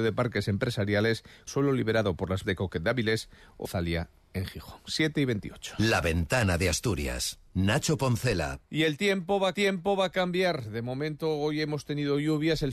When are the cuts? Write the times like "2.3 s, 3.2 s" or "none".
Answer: 1.5 s, 2.4 s, 3.6 s, 7.5 s, 8.6 s, 9.5 s